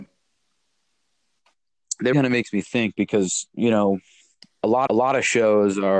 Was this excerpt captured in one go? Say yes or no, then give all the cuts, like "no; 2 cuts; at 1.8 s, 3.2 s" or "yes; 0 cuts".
no; 2 cuts; at 2.1 s, 4.9 s